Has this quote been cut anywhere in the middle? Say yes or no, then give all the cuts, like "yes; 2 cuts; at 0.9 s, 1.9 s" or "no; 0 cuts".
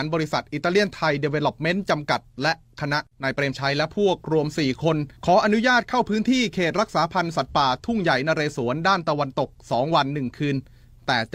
yes; 2 cuts; at 3.1 s, 5.2 s